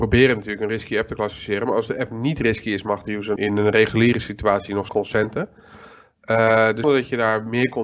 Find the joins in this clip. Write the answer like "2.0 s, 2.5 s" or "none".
3.4 s, 4.9 s, 6.8 s